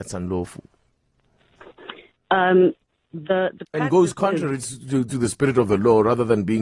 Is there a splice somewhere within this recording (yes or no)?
no